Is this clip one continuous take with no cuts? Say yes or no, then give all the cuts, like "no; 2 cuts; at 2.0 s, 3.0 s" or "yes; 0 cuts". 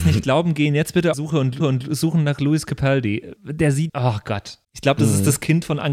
no; 5 cuts; at 1.1 s, 1.6 s, 3.4 s, 3.9 s, 4.6 s